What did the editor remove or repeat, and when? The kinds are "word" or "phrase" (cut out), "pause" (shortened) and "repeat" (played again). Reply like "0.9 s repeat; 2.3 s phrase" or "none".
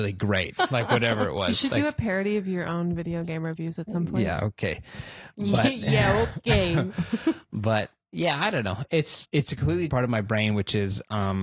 9.2 s word; 9.9 s word